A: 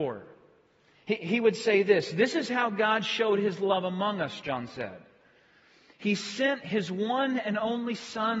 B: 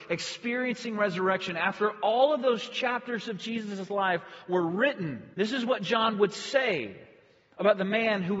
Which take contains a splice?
B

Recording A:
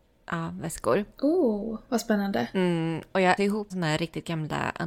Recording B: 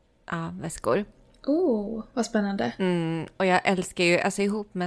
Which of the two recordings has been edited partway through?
A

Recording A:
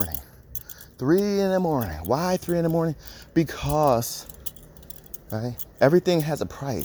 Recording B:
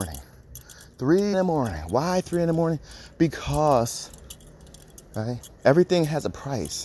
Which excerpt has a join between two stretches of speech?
B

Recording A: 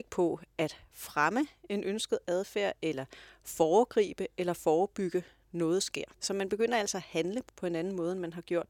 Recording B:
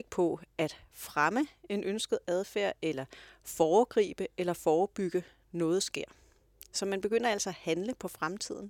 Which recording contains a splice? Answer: A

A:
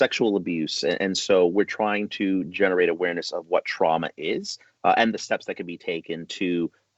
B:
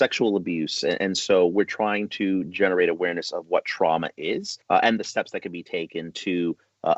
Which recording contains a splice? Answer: B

